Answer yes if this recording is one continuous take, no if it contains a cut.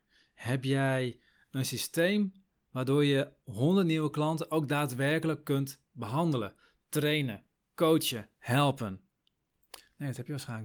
yes